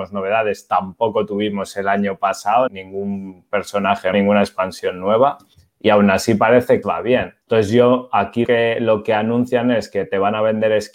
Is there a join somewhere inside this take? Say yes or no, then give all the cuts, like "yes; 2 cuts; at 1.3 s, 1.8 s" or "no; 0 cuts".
yes; 6 cuts; at 2.7 s, 4.1 s, 5.5 s, 6.8 s, 7.4 s, 8.4 s